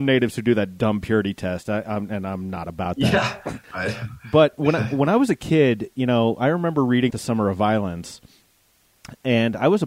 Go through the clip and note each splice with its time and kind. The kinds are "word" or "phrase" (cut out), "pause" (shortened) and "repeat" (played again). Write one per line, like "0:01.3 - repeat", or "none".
0:03.6 - pause
0:07.1 - word